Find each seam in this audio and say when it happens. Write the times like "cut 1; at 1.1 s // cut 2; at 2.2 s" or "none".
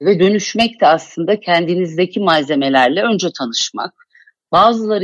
none